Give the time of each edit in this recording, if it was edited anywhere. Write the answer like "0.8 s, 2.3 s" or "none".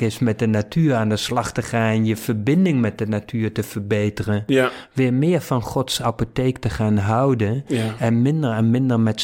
none